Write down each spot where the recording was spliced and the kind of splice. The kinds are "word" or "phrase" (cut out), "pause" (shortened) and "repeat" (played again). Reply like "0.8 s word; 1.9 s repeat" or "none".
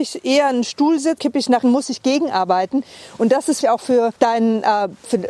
1.2 s word; 1.6 s word; 3.6 s word; 4.2 s pause